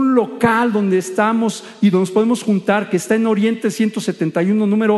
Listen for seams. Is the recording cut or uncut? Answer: uncut